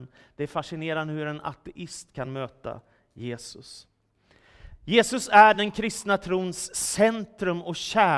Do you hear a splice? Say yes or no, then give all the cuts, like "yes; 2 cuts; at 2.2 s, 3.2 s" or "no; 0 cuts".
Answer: no; 0 cuts